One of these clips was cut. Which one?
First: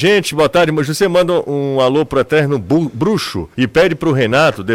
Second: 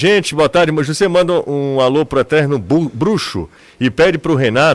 first; 1 cut; at 3.5 s

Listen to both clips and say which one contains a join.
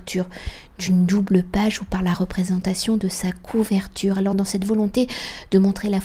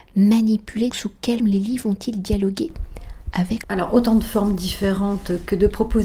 second; 3 cuts; at 0.9 s, 1.4 s, 3.6 s

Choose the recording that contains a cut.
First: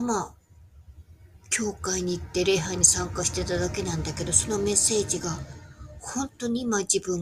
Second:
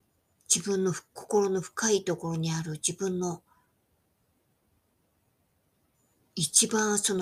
first; 1 cut; at 1.4 s

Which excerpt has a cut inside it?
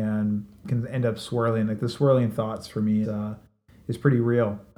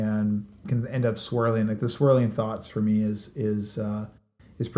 first; 1 cut; at 3.0 s

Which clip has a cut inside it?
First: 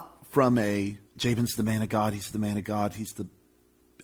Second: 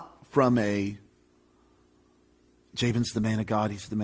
first; 1 cut; at 1.0 s

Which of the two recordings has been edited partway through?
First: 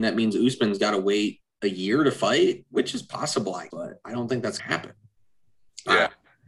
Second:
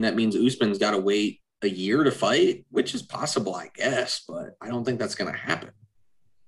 first; 2 cuts; at 3.7 s, 4.6 s

